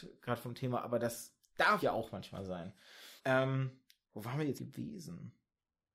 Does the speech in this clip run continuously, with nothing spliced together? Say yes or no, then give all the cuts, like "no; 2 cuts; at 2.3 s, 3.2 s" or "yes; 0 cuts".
no; 3 cuts; at 1.8 s, 3.2 s, 4.6 s